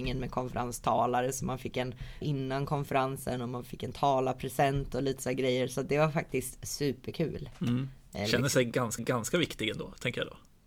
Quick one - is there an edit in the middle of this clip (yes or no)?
yes